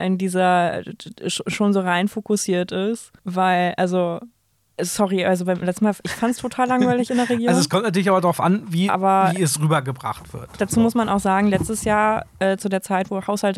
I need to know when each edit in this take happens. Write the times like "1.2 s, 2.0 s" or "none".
3.2 s, 4.6 s

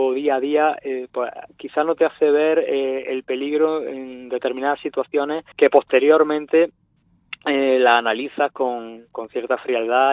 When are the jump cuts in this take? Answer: 5.5 s

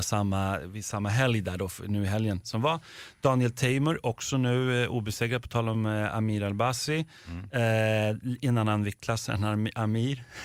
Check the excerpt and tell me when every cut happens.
none

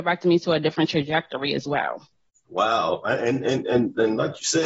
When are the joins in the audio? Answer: none

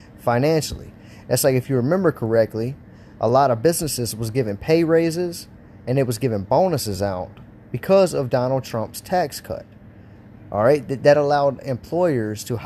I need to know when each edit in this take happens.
none

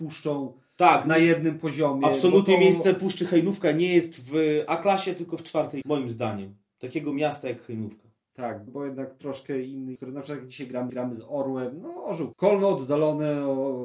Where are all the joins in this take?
5.8 s, 8.7 s, 10.0 s, 10.9 s, 12.3 s

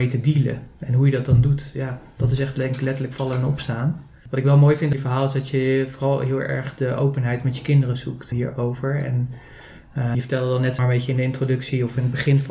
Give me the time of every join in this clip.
4.9 s, 8.3 s, 10.1 s, 10.8 s

